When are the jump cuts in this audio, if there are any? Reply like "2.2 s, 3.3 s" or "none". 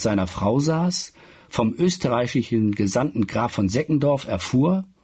none